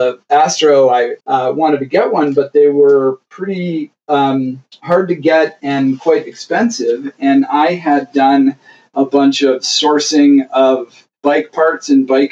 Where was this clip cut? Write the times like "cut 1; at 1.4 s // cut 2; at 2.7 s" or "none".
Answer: cut 1; at 1.2 s // cut 2; at 11.2 s